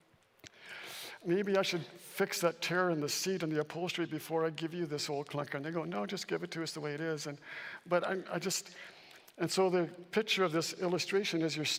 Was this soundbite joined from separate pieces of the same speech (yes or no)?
no